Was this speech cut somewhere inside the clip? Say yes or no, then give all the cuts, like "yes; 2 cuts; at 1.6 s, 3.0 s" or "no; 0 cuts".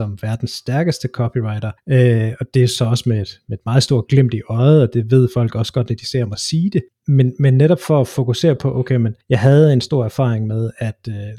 no; 0 cuts